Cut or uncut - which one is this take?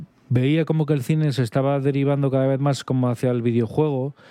uncut